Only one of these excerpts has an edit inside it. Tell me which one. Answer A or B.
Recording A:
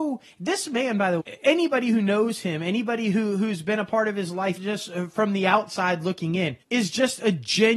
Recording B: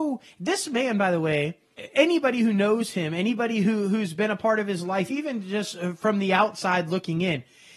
A